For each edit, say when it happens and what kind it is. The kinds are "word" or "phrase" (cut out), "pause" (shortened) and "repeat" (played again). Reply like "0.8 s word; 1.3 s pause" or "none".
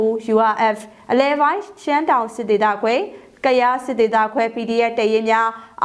none